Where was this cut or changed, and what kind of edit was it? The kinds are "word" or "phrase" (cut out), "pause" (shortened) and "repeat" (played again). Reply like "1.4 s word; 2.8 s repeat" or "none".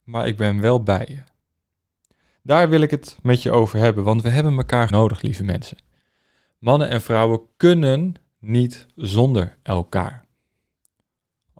4.9 s word

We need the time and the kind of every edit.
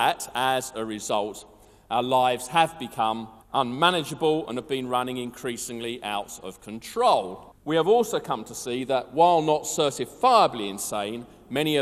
3.4 s pause; 7.6 s pause

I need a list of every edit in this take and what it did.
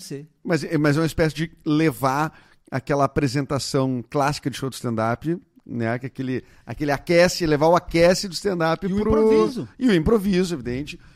none

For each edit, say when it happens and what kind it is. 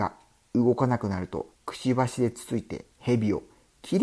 1.5 s pause; 2.9 s pause

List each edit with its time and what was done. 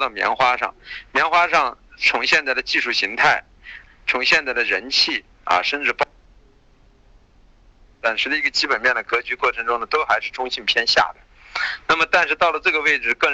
3.9 s word

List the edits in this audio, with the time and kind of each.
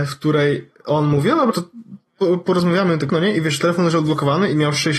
1.5 s word; 3.1 s word

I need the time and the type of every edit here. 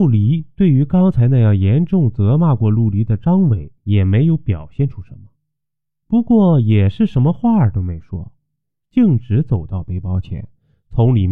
3.8 s pause

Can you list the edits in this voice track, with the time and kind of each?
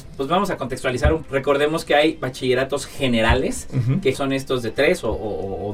1.2 s word; 4.1 s word

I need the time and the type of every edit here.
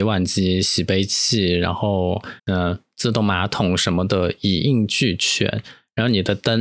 2.4 s pause

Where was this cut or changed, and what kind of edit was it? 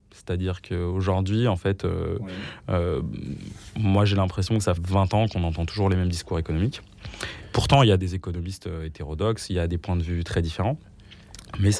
4.8 s word

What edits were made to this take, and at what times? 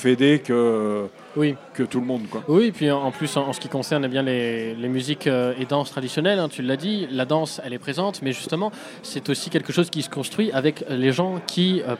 none

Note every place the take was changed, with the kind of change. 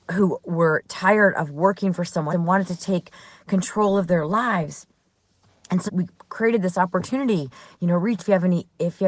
2.3 s word; 5.9 s word; 8.2 s word

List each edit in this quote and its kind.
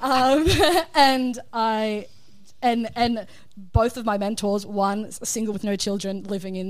5.5 s word

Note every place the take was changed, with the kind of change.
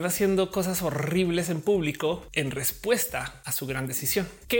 none

